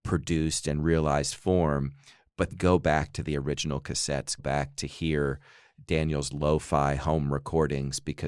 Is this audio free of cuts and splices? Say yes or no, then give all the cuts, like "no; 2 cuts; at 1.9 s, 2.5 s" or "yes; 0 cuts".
no; 2 cuts; at 2.5 s, 4.4 s